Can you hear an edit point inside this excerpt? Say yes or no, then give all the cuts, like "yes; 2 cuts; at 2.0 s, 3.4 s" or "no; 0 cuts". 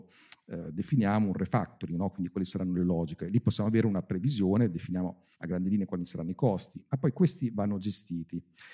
yes; 1 cut; at 5.3 s